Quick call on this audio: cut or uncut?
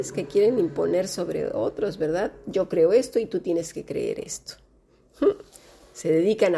uncut